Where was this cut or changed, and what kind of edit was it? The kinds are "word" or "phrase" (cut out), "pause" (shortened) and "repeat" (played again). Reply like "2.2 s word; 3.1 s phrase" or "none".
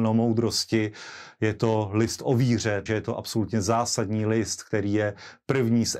2.9 s word